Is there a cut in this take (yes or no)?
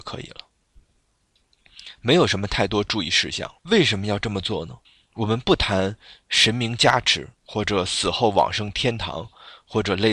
yes